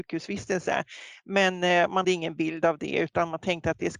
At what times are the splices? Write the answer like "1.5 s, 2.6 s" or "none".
2.0 s